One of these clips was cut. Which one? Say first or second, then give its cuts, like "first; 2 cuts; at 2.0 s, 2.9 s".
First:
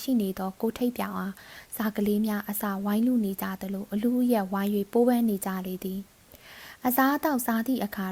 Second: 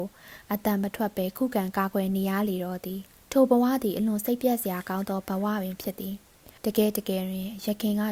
second; 2 cuts; at 3.2 s, 6.6 s